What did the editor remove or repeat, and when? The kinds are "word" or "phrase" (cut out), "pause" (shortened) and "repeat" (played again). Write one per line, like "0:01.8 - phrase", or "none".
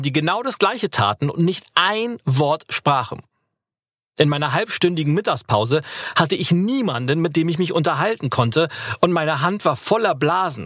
none